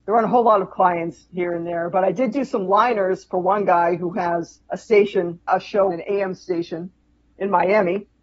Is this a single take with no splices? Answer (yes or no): no